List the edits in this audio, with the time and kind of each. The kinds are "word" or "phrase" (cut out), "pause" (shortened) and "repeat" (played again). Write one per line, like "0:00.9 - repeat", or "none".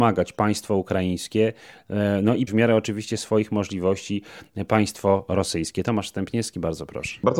0:02.5 - word